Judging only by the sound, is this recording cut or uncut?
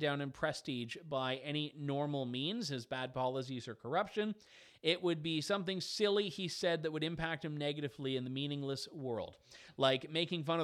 uncut